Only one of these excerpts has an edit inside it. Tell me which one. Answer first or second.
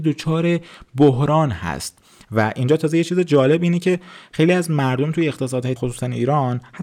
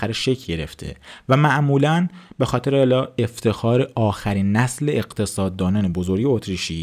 first